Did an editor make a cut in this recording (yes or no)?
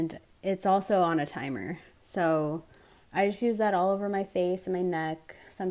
yes